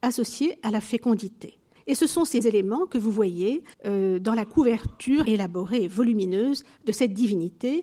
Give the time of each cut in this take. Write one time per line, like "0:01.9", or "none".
0:01.8
0:02.4
0:03.7
0:05.2